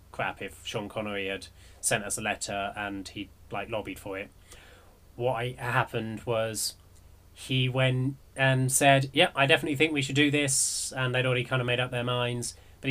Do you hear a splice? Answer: no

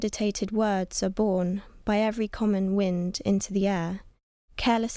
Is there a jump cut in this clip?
no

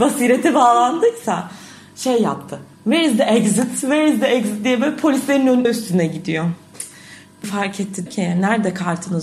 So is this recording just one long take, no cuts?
no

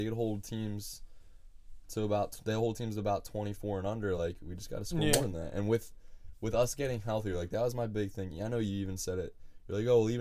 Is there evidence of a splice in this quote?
no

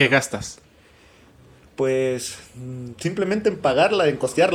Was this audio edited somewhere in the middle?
no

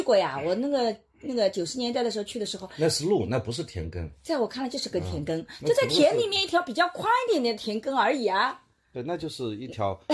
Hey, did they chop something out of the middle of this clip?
no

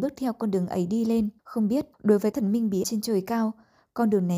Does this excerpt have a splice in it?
yes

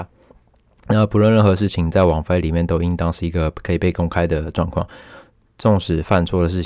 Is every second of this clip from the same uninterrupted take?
yes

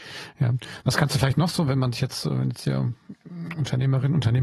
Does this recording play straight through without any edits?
yes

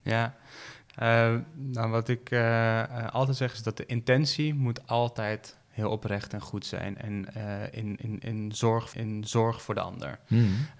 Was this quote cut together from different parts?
yes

